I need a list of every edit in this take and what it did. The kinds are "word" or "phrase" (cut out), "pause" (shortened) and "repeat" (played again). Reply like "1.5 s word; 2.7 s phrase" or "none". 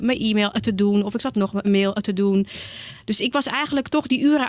1.3 s word; 1.6 s word

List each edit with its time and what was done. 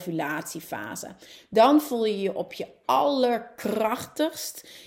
none

